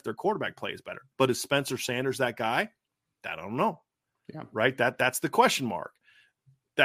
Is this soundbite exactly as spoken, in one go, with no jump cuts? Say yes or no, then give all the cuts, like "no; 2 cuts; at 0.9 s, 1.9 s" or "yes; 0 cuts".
yes; 0 cuts